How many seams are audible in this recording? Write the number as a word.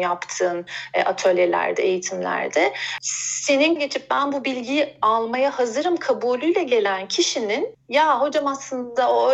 one